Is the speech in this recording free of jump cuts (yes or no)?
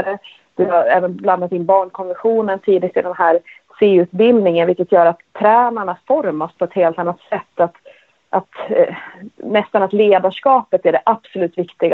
yes